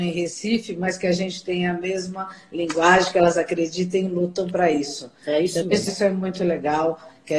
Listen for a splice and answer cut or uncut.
cut